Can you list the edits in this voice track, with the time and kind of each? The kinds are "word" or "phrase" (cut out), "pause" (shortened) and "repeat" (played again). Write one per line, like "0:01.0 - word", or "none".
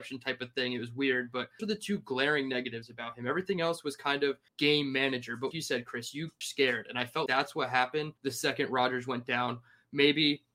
0:01.6 - word
0:04.5 - pause
0:05.5 - word
0:06.4 - phrase
0:07.3 - word
0:08.2 - pause